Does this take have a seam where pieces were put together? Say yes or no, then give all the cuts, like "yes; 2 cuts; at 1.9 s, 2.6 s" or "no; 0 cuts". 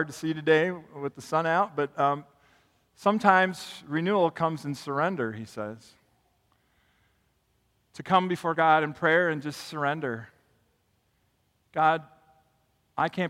no; 0 cuts